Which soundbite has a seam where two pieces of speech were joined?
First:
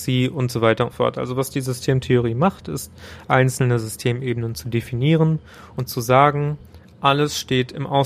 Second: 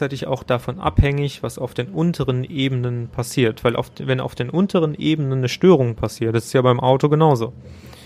first; 1 cut; at 0.9 s

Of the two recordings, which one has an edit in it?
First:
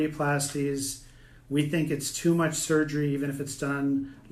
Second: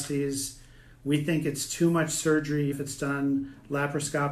second; 1 cut; at 2.7 s

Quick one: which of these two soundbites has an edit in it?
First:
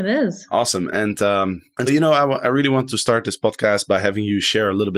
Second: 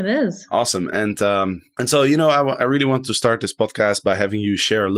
first; 1 cut; at 1.9 s

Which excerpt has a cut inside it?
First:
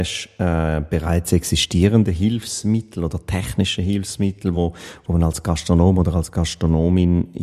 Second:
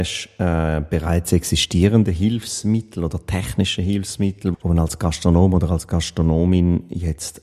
second; 1 cut; at 4.5 s

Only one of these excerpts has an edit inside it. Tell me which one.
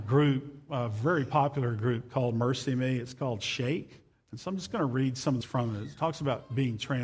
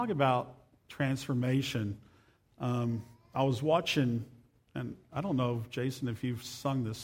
first; 2 cuts; at 4.1 s, 5.4 s

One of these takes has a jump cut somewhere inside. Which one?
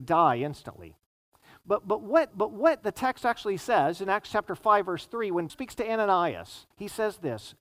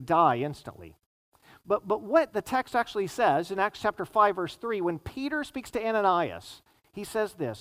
first; 3 cuts; at 2.3 s, 5.5 s, 6.7 s

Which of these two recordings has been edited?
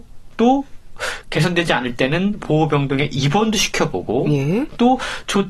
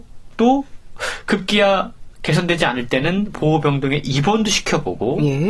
first; 1 cut; at 1.2 s

